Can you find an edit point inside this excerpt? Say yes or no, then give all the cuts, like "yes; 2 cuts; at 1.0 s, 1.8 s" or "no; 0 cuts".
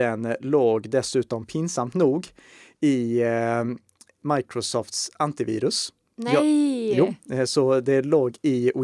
no; 0 cuts